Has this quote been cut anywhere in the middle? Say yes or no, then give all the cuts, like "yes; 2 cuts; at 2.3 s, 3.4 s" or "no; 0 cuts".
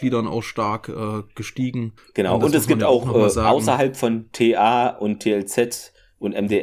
yes; 1 cut; at 2.0 s